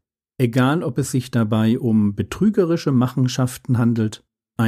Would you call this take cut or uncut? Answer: uncut